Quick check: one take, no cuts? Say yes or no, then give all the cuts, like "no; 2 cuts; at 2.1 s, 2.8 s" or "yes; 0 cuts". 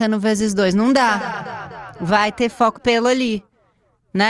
no; 1 cut; at 2.7 s